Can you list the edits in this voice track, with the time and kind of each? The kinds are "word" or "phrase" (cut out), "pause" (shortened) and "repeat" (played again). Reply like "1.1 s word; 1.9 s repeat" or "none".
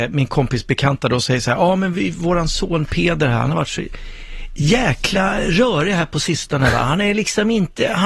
none